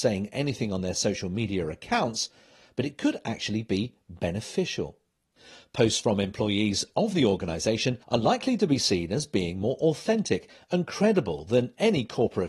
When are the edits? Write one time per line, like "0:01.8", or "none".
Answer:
0:08.0